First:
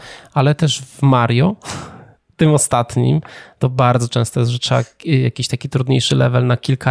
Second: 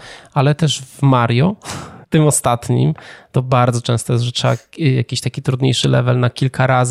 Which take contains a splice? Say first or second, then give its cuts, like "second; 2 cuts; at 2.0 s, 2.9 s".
second; 1 cut; at 2.0 s